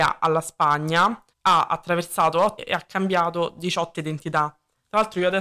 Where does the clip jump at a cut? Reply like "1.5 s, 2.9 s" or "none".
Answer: 1.3 s, 2.6 s, 3.9 s